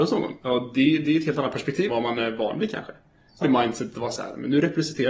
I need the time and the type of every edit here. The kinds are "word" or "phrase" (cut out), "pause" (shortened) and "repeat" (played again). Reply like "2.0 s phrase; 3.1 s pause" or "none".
1.9 s word; 3.4 s phrase